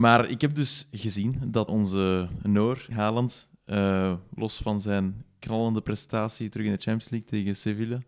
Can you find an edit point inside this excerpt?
yes; 2 cuts; at 1.7 s, 2.9 s

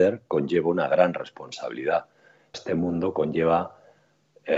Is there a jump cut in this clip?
yes; 1 cut; at 2.5 s

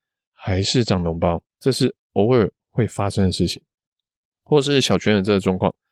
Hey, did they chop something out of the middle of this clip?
yes; 1 cut; at 1.5 s

